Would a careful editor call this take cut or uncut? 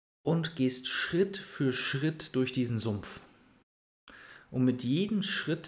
uncut